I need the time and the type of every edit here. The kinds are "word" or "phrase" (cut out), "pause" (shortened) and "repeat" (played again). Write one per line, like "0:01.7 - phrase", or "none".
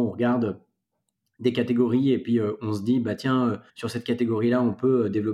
0:03.7 - pause